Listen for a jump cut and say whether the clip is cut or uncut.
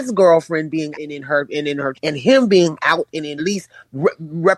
cut